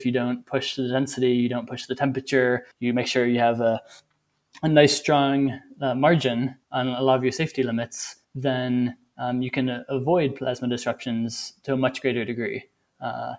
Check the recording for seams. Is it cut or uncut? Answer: cut